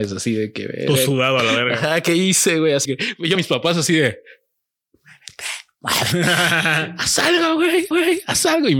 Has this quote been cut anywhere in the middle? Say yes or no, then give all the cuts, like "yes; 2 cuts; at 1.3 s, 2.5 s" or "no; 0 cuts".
yes; 3 cuts; at 2.8 s, 3.3 s, 7.9 s